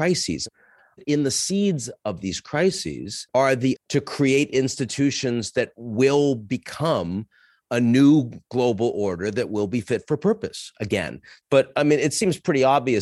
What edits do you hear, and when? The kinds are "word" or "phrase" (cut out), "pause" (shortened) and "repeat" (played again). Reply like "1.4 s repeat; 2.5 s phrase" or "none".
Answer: 3.8 s word